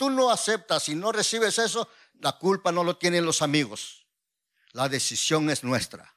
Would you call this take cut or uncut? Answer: uncut